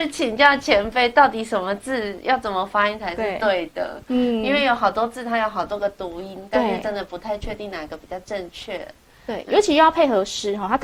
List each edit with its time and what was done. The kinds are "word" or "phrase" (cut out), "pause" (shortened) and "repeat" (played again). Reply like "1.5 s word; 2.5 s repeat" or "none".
none

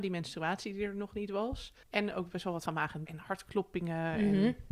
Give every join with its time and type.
1.8 s pause; 2.7 s word; 3.1 s word

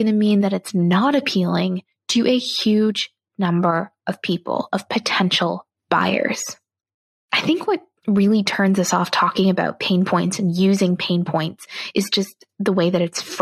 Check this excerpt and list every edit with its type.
none

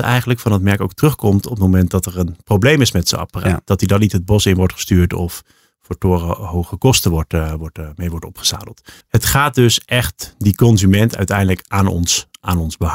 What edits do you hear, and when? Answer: 9.0 s pause

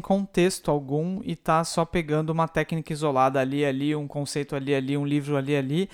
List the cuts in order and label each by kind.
none

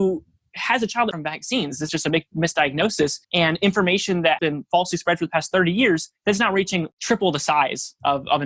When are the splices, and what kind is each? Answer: 1.1 s phrase; 1.9 s word; 3.2 s pause; 4.4 s word; 6.2 s pause; 6.9 s pause

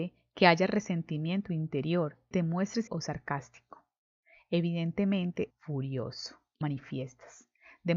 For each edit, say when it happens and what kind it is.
1.4 s word; 2.3 s word; 2.9 s word; 5.5 s word; 6.6 s word

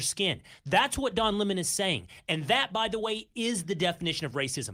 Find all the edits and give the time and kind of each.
none

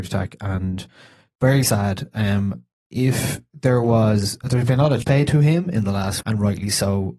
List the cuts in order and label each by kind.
1.6 s word; 5.0 s word; 6.2 s word

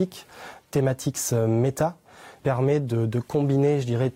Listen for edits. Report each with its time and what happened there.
2.4 s word

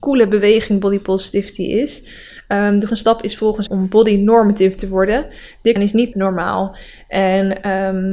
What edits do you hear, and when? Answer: 2.9 s word; 3.7 s phrase; 5.8 s word; 6.1 s phrase

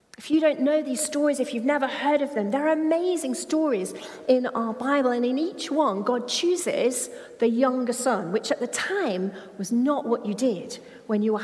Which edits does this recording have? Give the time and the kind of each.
none

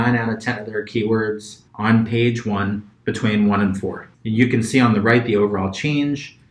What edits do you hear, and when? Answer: 1.7 s pause; 2.9 s pause; 4.1 s pause

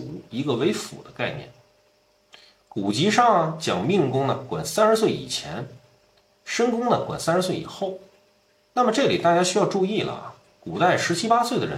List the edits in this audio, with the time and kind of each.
none

